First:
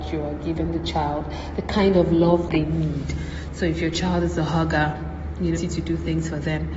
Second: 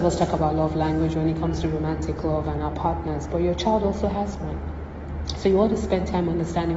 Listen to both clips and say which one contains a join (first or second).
first